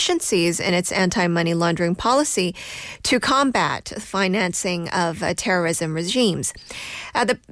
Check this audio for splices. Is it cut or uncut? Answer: uncut